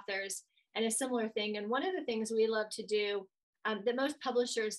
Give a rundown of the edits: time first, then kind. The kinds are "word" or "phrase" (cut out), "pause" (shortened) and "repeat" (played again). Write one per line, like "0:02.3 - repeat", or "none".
none